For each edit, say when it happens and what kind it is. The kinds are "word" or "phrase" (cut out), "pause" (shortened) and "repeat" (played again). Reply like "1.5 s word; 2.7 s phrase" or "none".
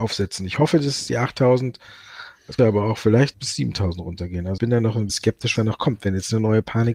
2.6 s word; 3.3 s word; 4.6 s word; 5.1 s word; 5.6 s word